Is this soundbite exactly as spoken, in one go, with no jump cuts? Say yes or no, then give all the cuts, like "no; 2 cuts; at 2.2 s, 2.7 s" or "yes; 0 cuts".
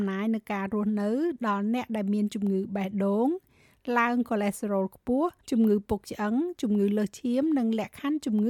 no; 1 cut; at 5.4 s